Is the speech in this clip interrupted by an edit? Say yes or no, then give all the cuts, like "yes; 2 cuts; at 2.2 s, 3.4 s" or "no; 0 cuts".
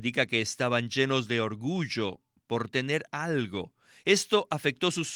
no; 0 cuts